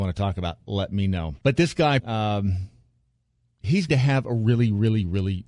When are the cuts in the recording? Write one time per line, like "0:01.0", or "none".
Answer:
0:01.4
0:02.0
0:03.9